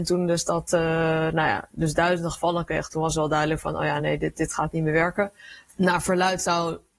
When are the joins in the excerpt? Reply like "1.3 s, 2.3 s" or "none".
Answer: none